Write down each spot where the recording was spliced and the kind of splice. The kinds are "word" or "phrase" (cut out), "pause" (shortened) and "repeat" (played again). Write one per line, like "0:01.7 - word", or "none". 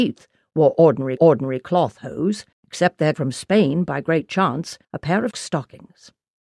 0:01.2 - repeat
0:02.5 - pause
0:03.1 - word
0:04.8 - pause
0:05.3 - word